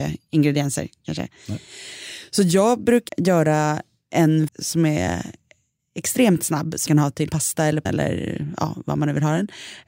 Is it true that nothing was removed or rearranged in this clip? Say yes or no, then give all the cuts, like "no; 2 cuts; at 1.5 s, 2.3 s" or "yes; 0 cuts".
no; 5 cuts; at 3.1 s, 4.5 s, 6.9 s, 7.3 s, 7.9 s